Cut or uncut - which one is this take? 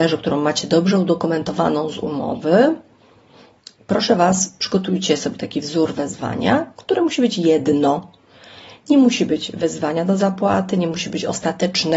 uncut